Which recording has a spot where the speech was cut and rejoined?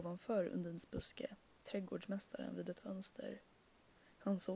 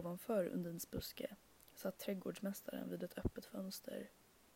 first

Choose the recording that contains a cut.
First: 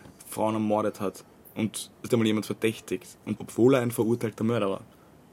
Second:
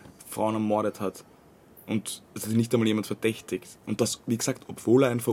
first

